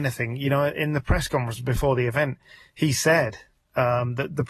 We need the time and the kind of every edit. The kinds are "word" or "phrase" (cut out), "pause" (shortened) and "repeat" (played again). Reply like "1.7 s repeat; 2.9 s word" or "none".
none

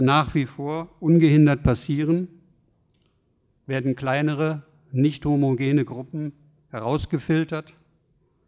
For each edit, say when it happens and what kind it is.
none

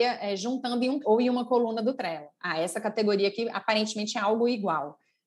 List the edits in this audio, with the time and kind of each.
1.0 s word

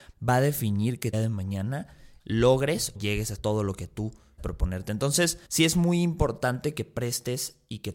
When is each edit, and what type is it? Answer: 1.1 s phrase; 2.2 s word; 2.9 s word; 3.3 s word; 4.4 s word; 5.5 s pause

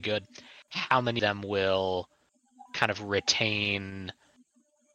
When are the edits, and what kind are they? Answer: 1.2 s word; 2.7 s pause

